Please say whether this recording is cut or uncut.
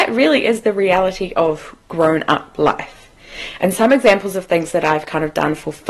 uncut